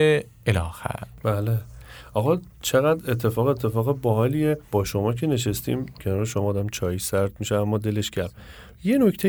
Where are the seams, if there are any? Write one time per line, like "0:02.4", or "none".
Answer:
0:02.5